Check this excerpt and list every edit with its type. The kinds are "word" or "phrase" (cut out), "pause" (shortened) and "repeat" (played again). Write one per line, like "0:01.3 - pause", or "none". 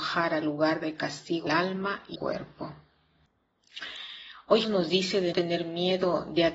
0:01.5 - word
0:02.2 - word
0:04.6 - word
0:05.3 - word